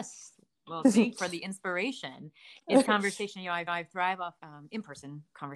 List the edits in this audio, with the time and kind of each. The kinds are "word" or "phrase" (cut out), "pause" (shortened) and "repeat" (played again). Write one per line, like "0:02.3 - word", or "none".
0:01.1 - word
0:02.8 - word
0:03.7 - repeat
0:04.4 - word